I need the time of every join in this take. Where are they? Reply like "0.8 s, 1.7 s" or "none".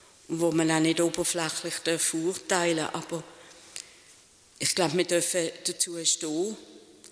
4.2 s